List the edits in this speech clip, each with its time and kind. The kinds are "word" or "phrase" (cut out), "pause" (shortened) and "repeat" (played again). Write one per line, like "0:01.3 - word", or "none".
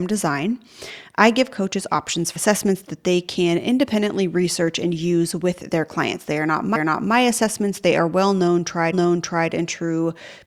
0:02.4 - word
0:06.7 - repeat
0:08.9 - repeat